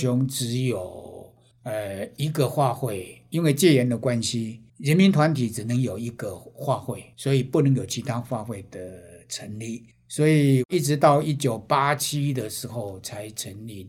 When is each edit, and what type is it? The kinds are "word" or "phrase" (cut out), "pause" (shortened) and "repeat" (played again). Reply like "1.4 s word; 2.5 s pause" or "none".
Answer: 1.5 s pause; 4.7 s pause; 7.1 s pause; 9.9 s pause